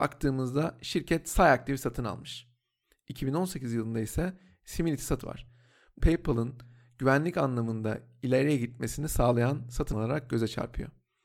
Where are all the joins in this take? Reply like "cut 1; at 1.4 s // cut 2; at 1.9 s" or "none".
cut 1; at 5.2 s // cut 2; at 6.0 s // cut 3; at 9.9 s